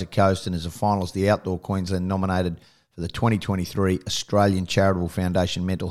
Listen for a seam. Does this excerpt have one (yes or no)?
no